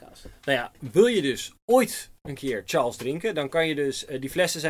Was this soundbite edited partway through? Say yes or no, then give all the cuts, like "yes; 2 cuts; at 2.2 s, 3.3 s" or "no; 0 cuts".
no; 0 cuts